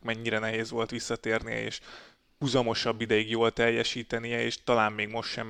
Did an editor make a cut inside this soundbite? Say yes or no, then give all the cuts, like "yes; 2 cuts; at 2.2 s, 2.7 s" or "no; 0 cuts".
no; 0 cuts